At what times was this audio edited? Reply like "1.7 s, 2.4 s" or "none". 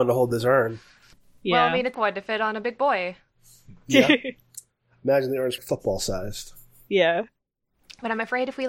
1.9 s, 5.6 s